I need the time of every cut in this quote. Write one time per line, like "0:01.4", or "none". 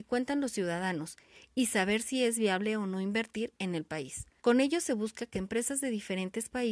0:04.4
0:05.3